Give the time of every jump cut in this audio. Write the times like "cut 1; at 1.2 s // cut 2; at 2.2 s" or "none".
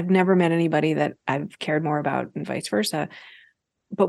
none